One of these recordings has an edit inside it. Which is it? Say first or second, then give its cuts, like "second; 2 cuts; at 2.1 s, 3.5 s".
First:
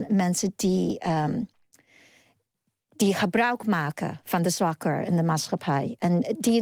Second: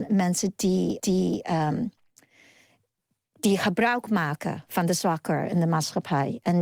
second; 1 cut; at 1.0 s